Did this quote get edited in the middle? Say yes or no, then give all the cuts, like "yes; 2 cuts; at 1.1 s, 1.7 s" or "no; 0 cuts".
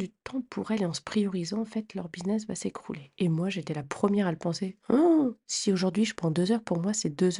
no; 0 cuts